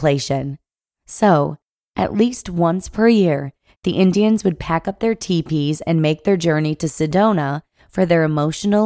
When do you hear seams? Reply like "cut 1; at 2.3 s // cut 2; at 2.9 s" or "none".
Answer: none